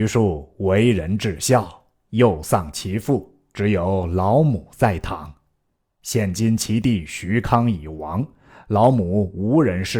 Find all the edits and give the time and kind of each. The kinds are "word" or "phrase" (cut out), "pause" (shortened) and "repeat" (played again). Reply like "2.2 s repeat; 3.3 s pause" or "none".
none